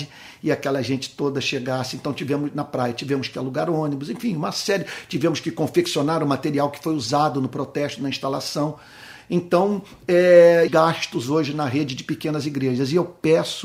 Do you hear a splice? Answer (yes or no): yes